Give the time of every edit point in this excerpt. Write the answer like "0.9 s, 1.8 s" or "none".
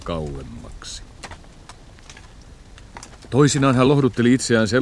none